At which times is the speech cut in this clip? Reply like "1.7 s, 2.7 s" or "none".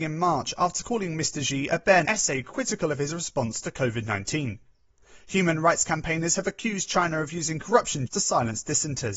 2.0 s, 8.1 s